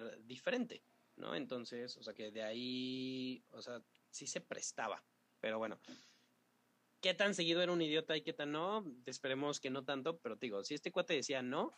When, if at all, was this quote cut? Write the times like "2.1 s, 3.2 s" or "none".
2.1 s